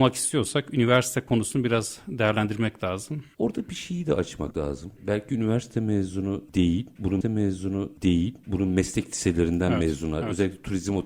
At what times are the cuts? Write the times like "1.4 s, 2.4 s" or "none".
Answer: 7.2 s